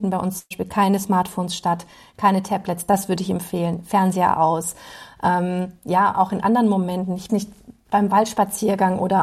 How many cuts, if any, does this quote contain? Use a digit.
1